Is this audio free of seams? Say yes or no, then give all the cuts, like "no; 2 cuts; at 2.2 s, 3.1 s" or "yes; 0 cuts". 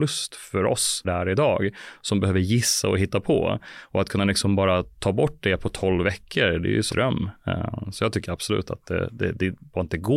no; 3 cuts; at 1.0 s, 4.9 s, 6.9 s